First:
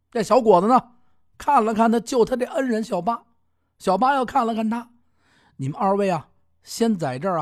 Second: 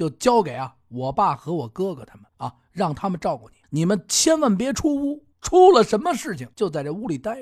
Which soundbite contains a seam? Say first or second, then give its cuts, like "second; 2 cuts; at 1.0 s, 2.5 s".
second; 4 cuts; at 2.3 s, 3.6 s, 5.3 s, 6.5 s